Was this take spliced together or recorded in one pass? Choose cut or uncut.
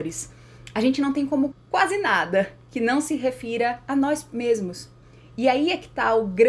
cut